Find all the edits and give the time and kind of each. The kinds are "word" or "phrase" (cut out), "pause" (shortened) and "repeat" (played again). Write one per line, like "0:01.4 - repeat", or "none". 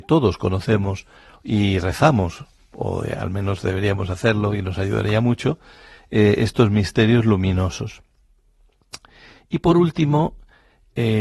none

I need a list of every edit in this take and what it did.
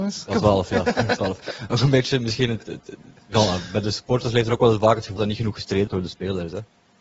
0:05.2 - word
0:05.9 - word

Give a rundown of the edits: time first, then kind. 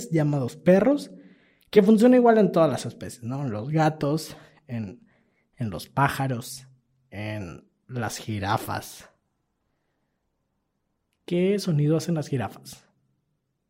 none

